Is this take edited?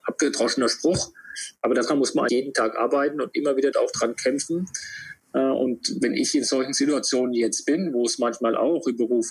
yes; 2 cuts; at 2.3 s, 3.7 s

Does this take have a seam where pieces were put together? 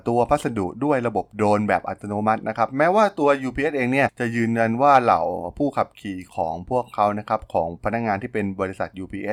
no; 0 cuts

